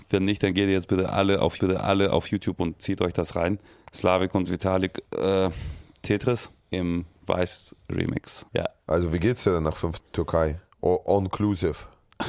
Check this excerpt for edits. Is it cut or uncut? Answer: cut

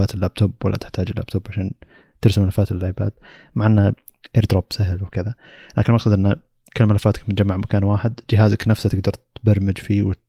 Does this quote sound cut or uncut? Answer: uncut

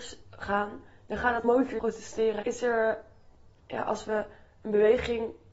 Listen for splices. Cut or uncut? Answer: cut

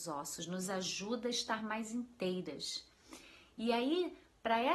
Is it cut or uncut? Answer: uncut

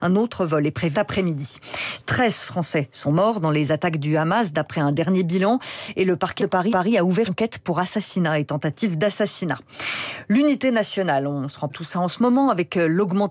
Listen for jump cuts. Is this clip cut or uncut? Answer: cut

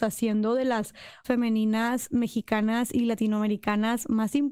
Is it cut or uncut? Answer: cut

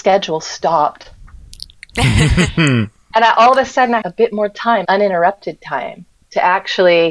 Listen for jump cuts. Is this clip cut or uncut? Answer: cut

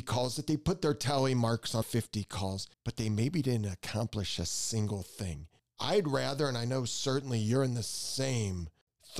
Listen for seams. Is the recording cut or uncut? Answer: cut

